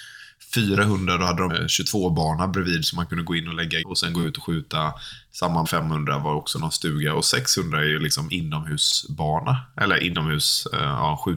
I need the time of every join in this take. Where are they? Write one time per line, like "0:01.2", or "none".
0:01.5
0:03.8
0:05.7

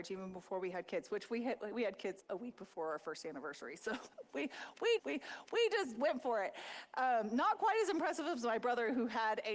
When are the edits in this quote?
0:02.2
0:05.0

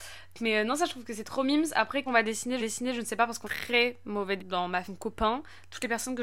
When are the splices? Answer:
0:02.1
0:02.6
0:03.4
0:04.4
0:04.8

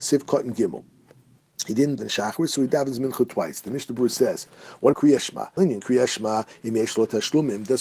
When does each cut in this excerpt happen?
0:02.0
0:04.9
0:05.6

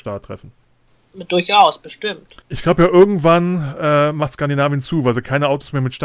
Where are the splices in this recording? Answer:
0:02.4

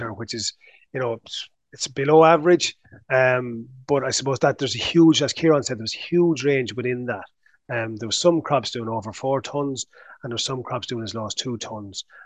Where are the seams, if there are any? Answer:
none

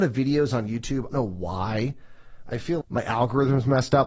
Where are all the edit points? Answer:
0:01.1
0:02.8

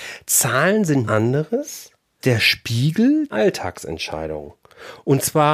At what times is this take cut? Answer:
0:01.0
0:02.2
0:03.3

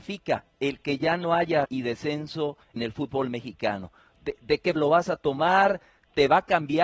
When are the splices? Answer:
0:01.6
0:02.8
0:04.8

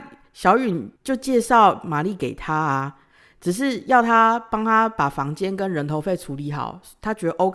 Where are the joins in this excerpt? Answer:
0:01.0

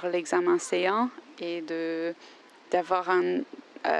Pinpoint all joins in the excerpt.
none

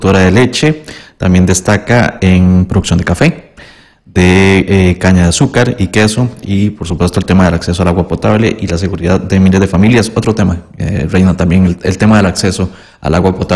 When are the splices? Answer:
none

